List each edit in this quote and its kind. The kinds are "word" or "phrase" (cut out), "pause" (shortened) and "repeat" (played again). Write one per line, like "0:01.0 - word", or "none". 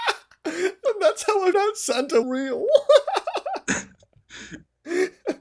0:01.5 - word
0:02.2 - word